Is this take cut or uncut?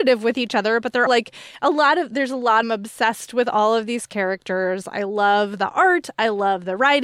cut